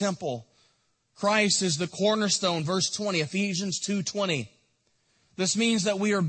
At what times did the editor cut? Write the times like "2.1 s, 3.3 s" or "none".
none